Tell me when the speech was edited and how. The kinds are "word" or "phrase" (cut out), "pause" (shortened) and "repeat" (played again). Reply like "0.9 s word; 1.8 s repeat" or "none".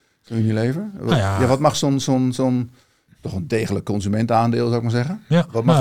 none